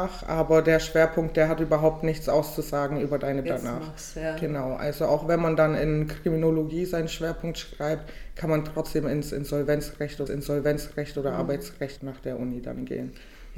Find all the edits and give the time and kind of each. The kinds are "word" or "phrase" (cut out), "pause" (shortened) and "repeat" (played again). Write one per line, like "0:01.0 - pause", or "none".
0:03.4 - phrase
0:10.3 - repeat
0:12.0 - word